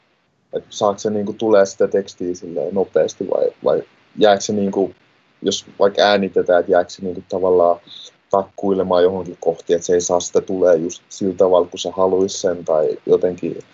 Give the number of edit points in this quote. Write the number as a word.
three